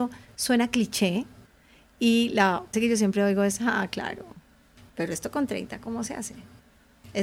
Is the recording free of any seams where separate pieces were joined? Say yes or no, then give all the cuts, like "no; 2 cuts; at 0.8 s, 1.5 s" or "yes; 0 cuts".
no; 1 cut; at 2.7 s